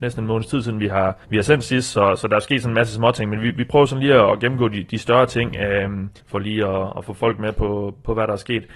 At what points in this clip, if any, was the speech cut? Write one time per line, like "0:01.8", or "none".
0:01.2
0:06.2